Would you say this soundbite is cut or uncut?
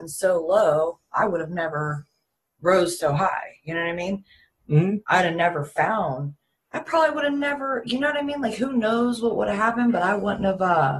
uncut